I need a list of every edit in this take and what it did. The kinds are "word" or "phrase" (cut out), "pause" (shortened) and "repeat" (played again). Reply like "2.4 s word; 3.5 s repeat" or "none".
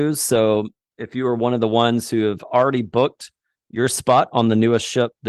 none